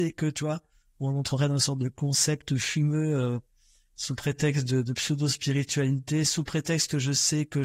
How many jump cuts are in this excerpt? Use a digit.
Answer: 0